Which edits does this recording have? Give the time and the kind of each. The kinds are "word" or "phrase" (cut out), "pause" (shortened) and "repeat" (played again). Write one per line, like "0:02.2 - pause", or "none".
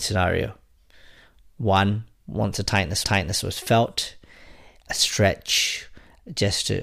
0:03.0 - repeat
0:04.9 - word